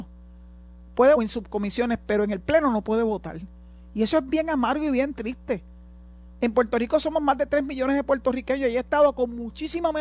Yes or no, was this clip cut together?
yes